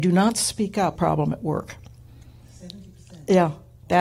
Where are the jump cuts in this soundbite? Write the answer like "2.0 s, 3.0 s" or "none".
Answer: 1.0 s